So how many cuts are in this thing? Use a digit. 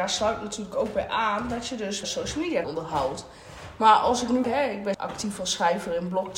4